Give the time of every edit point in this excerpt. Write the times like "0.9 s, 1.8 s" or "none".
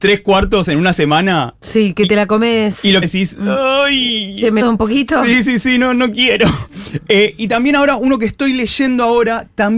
3.0 s, 4.6 s